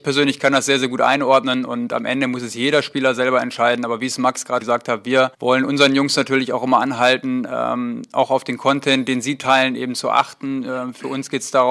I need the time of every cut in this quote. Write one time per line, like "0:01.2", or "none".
0:04.6
0:05.3